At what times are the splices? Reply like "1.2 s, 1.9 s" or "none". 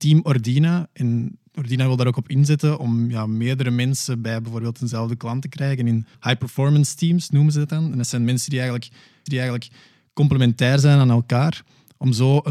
6.1 s, 9.3 s